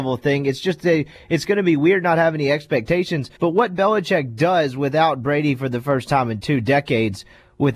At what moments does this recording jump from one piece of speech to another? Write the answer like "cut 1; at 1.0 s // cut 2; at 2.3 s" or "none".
cut 1; at 3.4 s